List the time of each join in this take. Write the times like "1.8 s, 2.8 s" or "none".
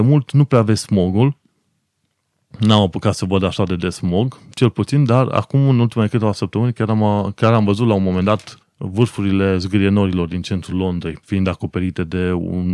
8.6 s, 11.2 s